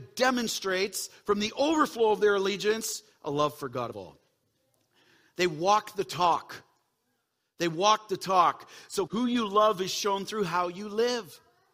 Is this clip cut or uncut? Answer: cut